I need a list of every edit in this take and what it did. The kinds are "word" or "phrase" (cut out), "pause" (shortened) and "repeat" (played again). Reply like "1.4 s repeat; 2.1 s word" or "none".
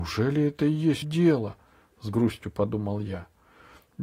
1.0 s word